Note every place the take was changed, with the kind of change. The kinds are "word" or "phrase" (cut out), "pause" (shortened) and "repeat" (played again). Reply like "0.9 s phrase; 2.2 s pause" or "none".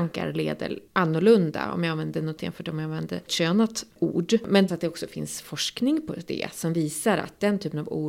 2.4 s word; 3.3 s word; 4.7 s word